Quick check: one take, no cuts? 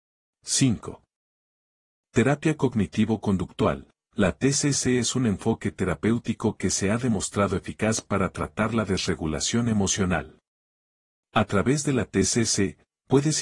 yes; 0 cuts

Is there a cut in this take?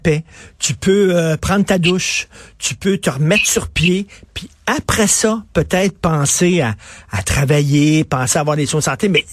no; 0 cuts

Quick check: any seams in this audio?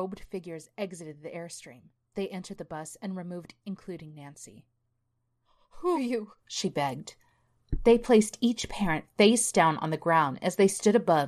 yes; 4 cuts; at 1.9 s, 3.6 s, 5.9 s, 6.4 s

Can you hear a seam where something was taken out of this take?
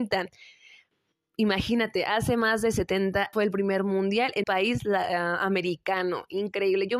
yes; 2 cuts; at 3.3 s, 4.4 s

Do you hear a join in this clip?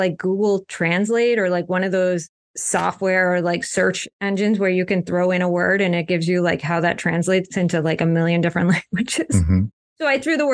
no; 0 cuts

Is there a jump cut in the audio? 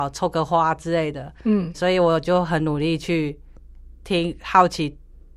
yes; 1 cut; at 1.7 s

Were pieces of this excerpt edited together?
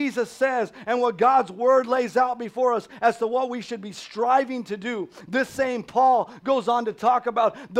no; 0 cuts

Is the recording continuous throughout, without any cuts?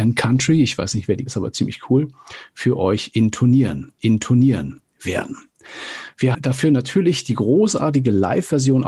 no; 3 cuts; at 1.3 s, 4.0 s, 6.3 s

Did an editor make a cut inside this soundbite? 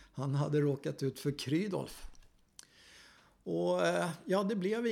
no; 0 cuts

